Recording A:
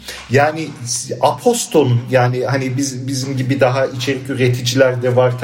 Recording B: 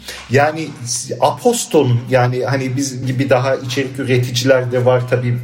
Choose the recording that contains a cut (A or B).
B